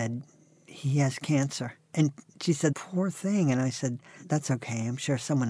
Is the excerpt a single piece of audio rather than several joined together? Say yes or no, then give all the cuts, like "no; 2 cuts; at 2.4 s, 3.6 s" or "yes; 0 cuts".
yes; 0 cuts